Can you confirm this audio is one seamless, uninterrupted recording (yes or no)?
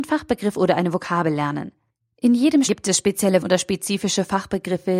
no